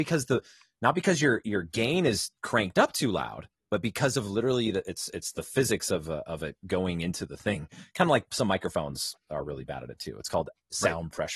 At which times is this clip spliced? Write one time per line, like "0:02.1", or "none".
0:02.4